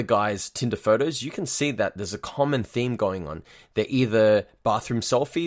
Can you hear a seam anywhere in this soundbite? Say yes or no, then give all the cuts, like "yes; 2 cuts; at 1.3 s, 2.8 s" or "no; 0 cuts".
no; 0 cuts